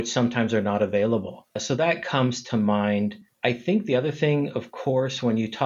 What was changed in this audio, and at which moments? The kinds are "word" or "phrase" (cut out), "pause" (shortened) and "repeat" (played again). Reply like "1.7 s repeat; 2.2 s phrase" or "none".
none